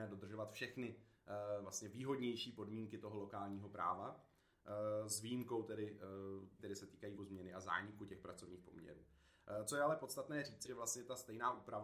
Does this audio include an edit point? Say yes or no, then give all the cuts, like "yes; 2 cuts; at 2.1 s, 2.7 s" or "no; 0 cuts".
yes; 3 cuts; at 6.6 s, 7.2 s, 10.6 s